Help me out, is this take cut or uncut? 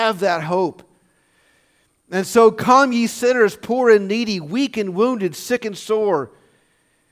uncut